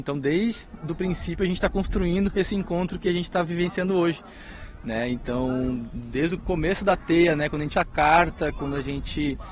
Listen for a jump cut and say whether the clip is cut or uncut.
cut